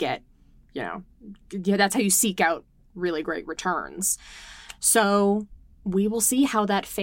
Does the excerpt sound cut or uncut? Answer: uncut